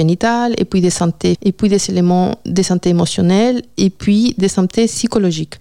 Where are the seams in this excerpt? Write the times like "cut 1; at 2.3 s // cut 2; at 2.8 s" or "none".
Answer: cut 1; at 1.3 s